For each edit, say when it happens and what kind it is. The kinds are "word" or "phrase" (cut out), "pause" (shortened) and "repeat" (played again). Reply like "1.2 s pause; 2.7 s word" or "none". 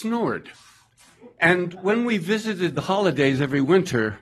none